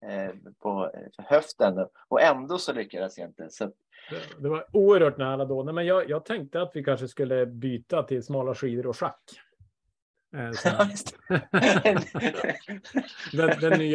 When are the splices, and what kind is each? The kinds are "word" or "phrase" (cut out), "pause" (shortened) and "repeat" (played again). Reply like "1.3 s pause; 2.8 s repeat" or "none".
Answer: none